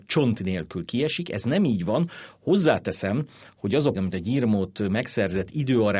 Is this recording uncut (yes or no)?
no